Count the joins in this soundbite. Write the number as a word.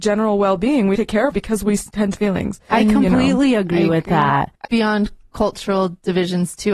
four